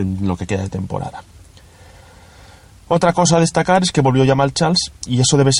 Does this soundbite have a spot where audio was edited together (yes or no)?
no